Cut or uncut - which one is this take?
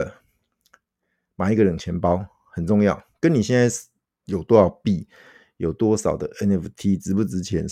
uncut